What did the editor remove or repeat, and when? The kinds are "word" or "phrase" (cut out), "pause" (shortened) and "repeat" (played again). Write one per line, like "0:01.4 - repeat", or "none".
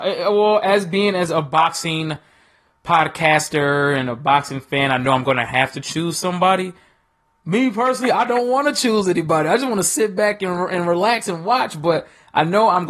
none